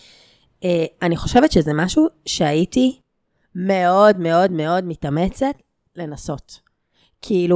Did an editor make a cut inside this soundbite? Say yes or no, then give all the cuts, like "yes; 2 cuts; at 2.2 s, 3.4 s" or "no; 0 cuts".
no; 0 cuts